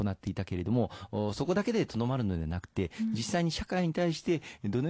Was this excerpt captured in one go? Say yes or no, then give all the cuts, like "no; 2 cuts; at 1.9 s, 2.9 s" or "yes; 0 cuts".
yes; 0 cuts